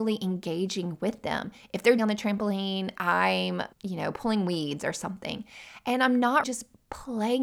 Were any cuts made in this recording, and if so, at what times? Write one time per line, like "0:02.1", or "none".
0:02.0
0:03.7
0:06.4